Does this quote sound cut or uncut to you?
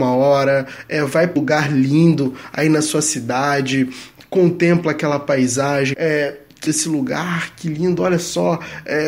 cut